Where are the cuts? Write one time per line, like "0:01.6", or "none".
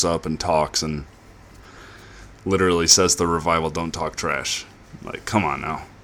none

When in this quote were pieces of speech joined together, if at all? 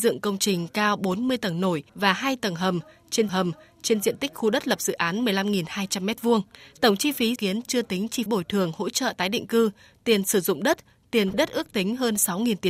0:01.9
0:03.3
0:06.6
0:07.4
0:08.3
0:11.3

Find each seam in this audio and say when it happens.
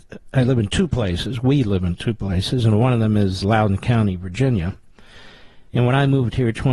0:03.4
0:05.7

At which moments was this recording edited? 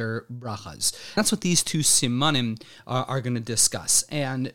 0:01.2

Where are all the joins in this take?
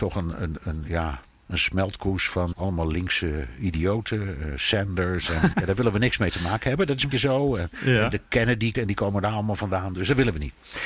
0:02.5
0:05.5
0:07.1
0:08.7

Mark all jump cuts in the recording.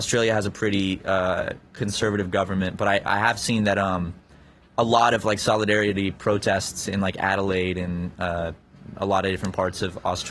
none

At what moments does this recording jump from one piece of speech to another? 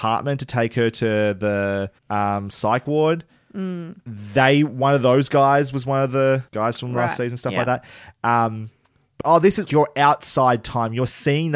0:02.0
0:06.5
0:09.2
0:09.7

